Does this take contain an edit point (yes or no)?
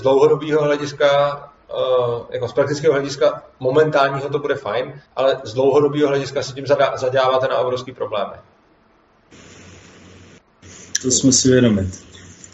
yes